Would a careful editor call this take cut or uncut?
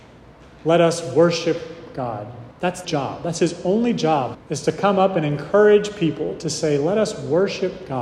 cut